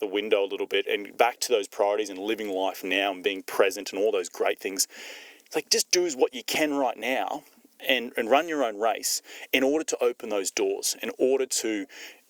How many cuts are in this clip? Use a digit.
0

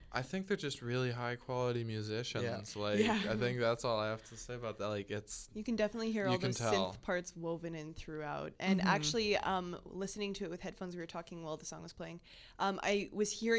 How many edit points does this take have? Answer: 0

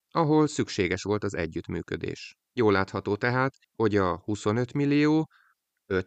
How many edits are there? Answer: 2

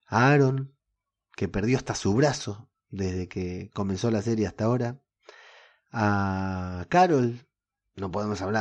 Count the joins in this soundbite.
0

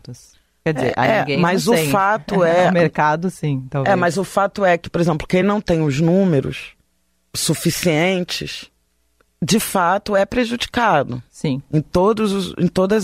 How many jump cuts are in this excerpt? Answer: 0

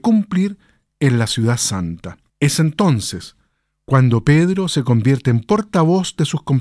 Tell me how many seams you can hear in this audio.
0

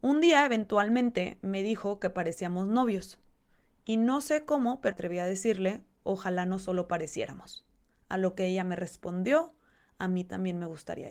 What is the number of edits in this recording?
1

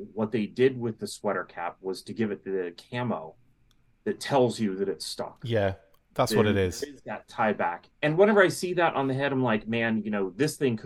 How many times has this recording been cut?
1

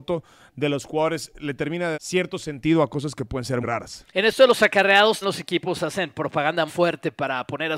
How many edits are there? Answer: 5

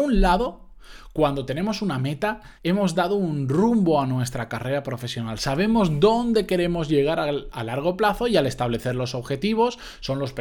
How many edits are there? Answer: 1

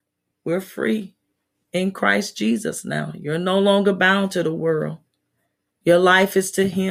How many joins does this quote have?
0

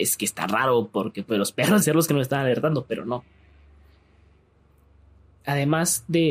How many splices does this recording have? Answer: 1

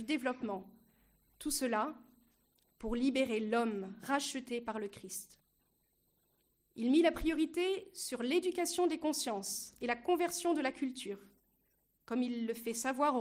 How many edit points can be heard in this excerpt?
0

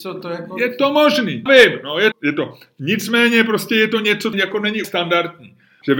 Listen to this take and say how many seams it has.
4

